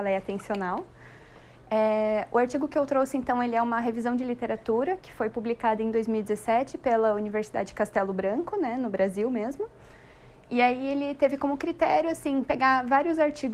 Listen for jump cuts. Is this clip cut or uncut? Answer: uncut